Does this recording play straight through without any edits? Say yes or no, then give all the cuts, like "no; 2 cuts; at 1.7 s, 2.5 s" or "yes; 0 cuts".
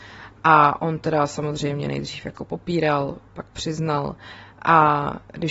yes; 0 cuts